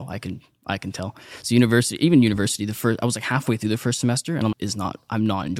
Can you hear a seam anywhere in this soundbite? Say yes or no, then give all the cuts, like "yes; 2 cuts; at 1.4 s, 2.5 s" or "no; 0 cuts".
yes; 1 cut; at 4.5 s